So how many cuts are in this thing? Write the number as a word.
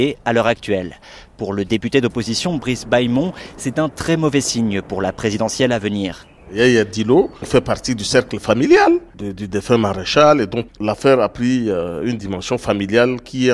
two